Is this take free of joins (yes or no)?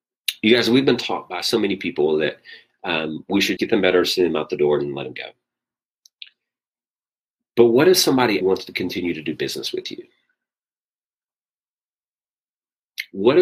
no